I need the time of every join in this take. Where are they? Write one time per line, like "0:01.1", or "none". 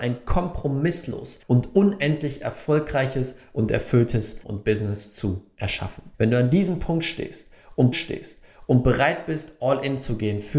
0:01.4
0:04.4
0:06.1
0:07.9

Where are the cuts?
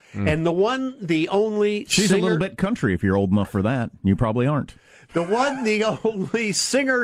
none

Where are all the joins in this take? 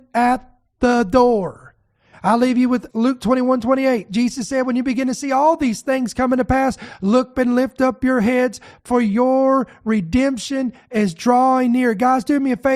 0:02.9
0:07.3

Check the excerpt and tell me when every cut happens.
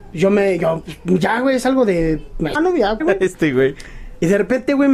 0:02.5
0:03.0

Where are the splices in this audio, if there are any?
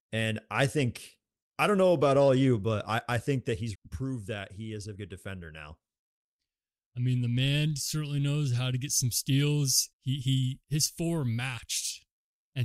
0:03.7
0:04.9
0:09.9

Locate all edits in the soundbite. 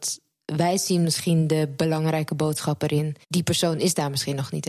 0:03.2

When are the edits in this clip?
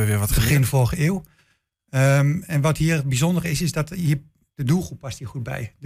none

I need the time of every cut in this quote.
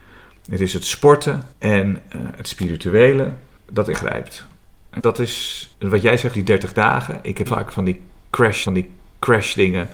0:01.5
0:03.6
0:03.9
0:05.0
0:05.7
0:06.3
0:07.5
0:08.7

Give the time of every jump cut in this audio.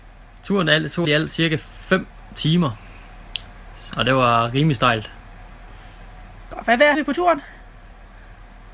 0:01.0
0:03.9
0:06.9

